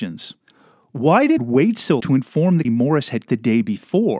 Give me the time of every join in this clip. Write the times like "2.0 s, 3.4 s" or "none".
1.4 s, 2.0 s, 2.6 s, 3.3 s

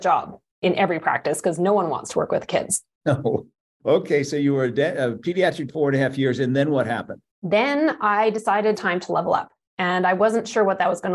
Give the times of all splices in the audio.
5.7 s, 8.7 s

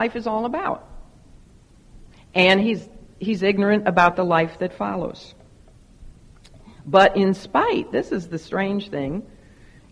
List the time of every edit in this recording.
none

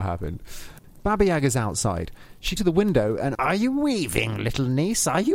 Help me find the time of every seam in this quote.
2.6 s, 3.3 s

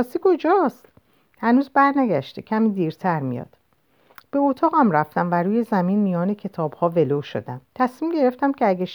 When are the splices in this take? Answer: 7.6 s

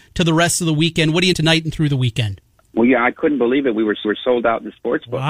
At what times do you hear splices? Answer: 1.3 s, 2.6 s, 4.0 s

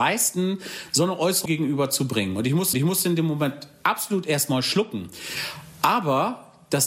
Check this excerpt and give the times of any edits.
1.5 s, 2.7 s

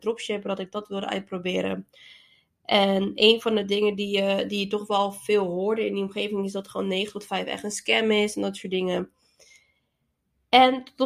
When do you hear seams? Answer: none

